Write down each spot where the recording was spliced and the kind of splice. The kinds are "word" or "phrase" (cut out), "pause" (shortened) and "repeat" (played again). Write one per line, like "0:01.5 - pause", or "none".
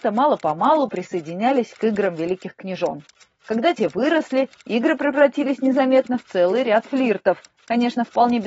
none